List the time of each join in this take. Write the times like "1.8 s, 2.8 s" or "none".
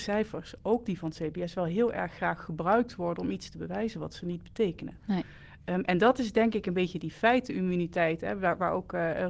none